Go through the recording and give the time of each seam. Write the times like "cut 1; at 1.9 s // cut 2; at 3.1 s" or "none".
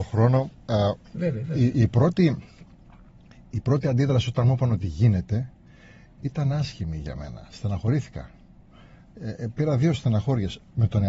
none